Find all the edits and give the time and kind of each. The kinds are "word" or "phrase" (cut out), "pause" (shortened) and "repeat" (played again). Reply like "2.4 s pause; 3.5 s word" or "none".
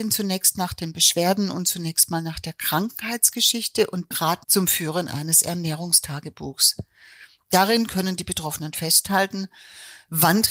4.1 s word; 4.4 s phrase